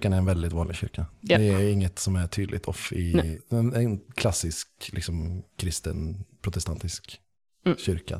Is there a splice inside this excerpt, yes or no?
no